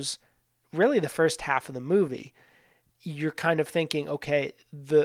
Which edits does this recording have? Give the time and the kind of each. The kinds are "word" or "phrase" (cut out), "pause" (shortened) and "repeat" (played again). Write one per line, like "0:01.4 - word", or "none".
none